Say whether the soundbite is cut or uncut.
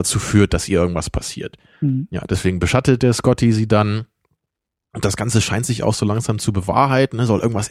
uncut